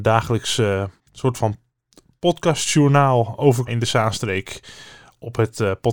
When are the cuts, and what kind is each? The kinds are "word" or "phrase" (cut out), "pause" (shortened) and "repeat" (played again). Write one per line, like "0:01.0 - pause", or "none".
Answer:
0:01.0 - pause
0:03.7 - word